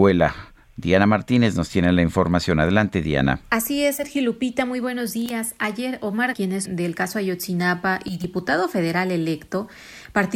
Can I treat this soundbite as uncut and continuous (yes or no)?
no